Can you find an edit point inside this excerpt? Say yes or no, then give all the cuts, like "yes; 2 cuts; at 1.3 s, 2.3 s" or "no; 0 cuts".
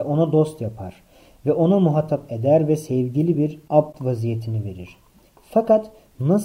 no; 0 cuts